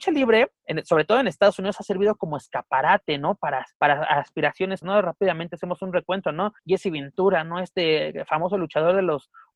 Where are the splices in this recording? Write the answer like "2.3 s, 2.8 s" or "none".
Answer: 3.7 s, 4.8 s, 6.6 s